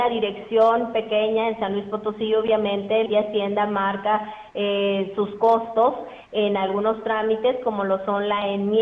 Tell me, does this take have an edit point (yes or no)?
yes